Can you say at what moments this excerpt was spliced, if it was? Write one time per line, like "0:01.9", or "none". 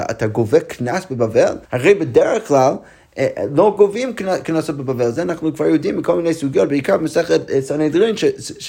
0:01.7